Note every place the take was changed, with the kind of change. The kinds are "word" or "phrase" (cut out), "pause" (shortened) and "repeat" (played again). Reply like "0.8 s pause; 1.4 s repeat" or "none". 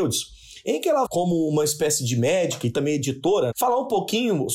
1.0 s word; 3.5 s word